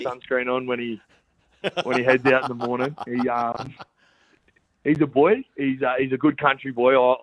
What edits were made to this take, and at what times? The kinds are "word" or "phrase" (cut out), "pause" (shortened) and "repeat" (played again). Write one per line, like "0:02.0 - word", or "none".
0:05.1 - word